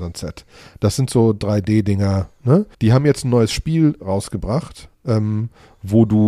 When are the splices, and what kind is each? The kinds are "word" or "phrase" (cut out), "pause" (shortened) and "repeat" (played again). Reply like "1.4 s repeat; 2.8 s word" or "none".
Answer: 2.7 s pause